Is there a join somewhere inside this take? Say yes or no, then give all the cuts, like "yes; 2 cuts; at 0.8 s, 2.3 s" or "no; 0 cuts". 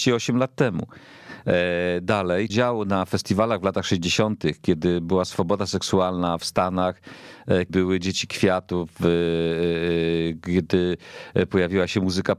yes; 3 cuts; at 2.5 s, 6.4 s, 7.7 s